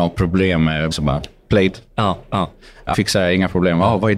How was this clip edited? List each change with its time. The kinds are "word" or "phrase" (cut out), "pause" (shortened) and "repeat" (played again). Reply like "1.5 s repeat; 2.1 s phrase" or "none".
0.9 s word; 2.9 s word